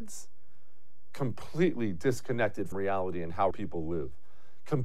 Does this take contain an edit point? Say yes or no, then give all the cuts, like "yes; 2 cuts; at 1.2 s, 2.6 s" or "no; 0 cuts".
yes; 2 cuts; at 2.7 s, 3.5 s